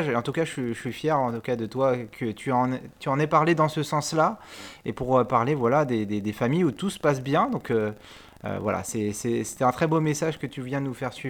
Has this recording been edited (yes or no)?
no